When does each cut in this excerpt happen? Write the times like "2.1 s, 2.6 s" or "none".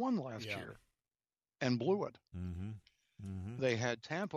none